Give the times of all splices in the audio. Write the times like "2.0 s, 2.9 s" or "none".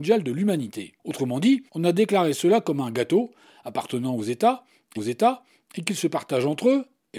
1.0 s, 1.7 s, 5.0 s